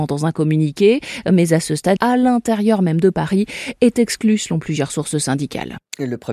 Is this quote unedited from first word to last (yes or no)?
no